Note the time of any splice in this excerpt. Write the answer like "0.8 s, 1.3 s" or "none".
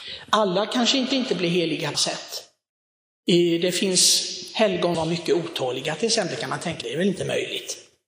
1.1 s, 1.9 s, 4.9 s, 6.8 s